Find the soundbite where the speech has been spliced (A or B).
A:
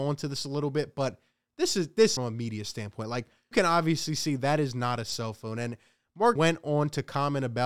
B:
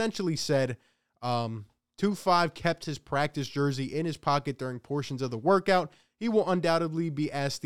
A